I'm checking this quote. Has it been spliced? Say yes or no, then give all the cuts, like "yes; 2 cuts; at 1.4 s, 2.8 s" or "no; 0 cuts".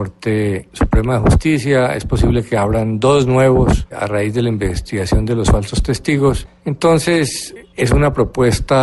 yes; 1 cut; at 3.9 s